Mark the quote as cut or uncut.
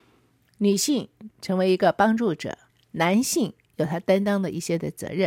cut